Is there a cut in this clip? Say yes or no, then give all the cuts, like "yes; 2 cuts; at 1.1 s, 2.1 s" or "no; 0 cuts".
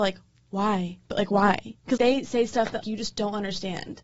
yes; 2 cuts; at 2.0 s, 2.8 s